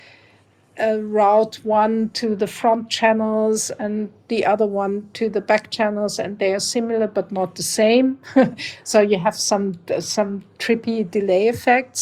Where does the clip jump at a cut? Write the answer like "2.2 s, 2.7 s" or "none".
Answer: none